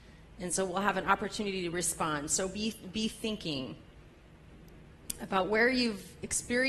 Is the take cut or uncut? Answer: uncut